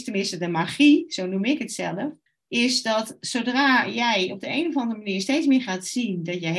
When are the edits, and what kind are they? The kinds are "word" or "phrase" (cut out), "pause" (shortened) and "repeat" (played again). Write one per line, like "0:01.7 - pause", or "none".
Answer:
0:02.3 - pause